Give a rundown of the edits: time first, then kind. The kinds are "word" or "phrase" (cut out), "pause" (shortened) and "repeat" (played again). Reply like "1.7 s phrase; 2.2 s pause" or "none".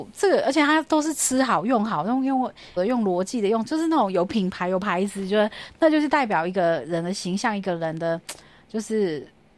2.8 s word

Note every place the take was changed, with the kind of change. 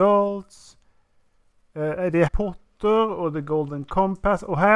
2.3 s word

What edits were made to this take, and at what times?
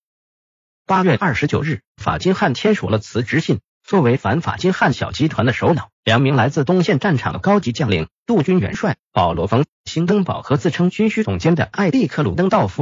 1.9 s pause; 3.7 s pause; 5.9 s pause; 9.7 s pause

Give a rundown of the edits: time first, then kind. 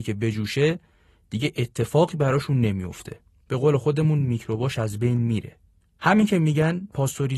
none

